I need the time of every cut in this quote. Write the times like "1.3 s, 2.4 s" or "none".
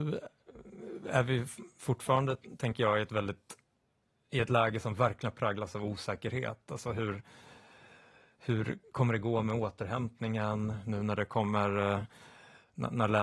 none